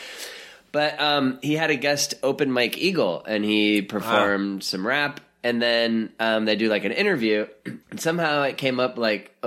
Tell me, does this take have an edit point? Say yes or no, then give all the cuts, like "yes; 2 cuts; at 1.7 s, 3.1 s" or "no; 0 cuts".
yes; 1 cut; at 7.8 s